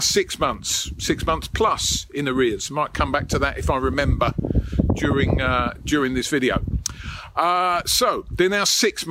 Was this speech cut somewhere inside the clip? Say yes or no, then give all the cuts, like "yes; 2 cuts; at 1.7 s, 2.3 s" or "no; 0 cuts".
no; 0 cuts